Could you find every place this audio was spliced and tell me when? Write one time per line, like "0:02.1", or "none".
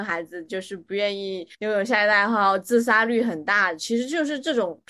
0:01.5